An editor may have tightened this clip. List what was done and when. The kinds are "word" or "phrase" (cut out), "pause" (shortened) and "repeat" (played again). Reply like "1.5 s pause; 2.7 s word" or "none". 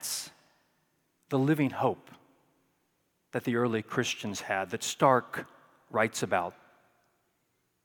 none